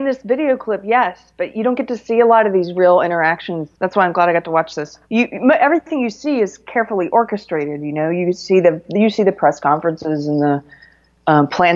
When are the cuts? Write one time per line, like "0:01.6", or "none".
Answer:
0:03.7
0:05.0